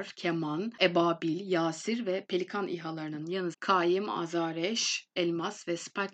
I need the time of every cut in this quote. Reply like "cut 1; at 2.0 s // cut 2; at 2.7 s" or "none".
cut 1; at 3.5 s